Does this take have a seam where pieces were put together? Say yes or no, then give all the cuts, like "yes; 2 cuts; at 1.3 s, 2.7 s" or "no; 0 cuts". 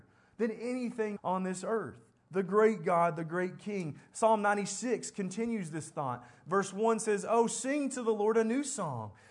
yes; 1 cut; at 1.2 s